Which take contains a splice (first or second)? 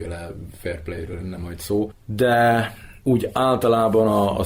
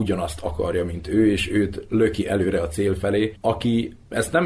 first